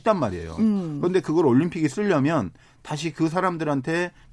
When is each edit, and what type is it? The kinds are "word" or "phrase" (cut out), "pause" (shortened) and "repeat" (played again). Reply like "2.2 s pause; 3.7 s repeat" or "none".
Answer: none